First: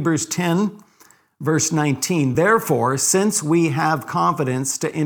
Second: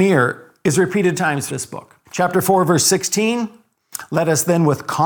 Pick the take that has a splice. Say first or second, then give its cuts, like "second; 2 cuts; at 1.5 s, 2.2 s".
second; 3 cuts; at 1.1 s, 1.5 s, 2.0 s